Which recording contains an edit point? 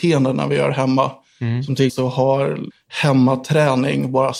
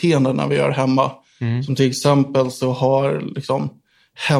first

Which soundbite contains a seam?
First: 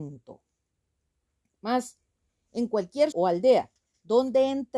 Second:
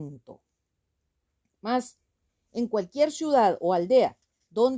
first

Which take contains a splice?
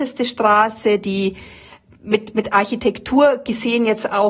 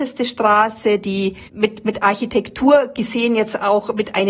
second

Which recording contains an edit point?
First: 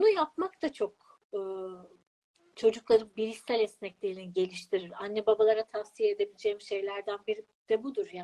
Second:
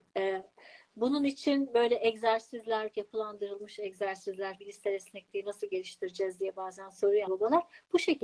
second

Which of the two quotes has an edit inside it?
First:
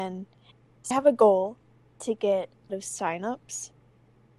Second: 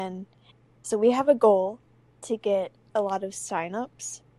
first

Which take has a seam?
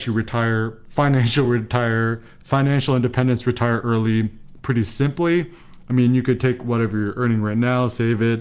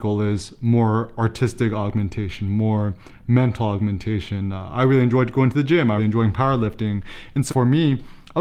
second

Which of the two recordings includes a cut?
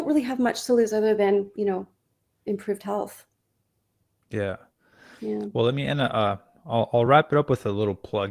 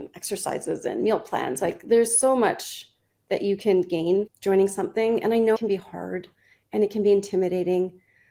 second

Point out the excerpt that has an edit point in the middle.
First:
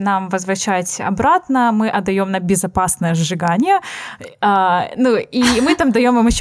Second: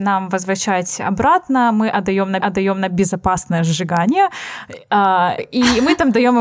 second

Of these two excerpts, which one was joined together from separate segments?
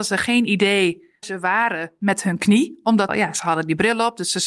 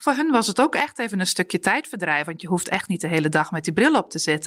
first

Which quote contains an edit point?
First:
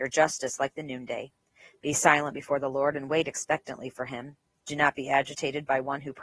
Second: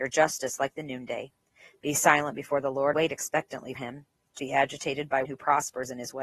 second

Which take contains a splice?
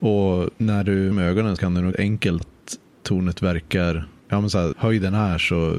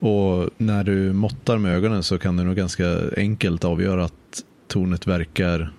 first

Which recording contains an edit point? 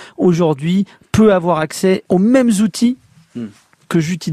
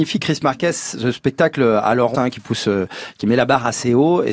second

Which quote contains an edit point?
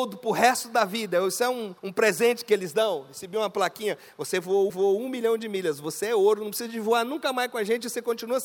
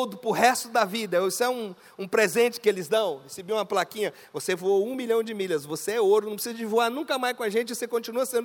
first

